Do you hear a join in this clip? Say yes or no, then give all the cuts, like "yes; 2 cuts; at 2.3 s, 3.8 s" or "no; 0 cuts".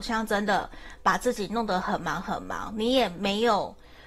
no; 0 cuts